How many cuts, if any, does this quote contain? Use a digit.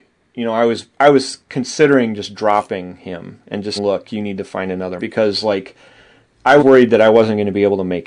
4